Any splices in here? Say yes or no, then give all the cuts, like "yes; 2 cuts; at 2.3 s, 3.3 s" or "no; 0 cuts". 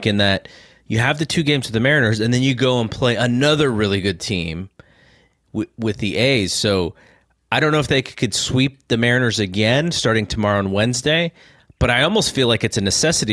no; 0 cuts